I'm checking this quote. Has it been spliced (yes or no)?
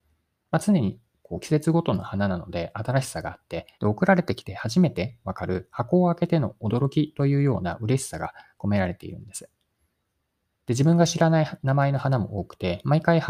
yes